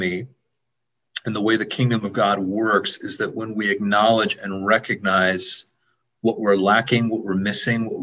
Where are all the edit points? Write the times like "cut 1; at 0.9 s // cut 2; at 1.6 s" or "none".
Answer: none